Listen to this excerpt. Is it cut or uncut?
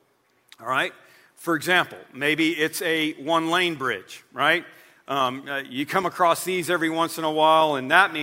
uncut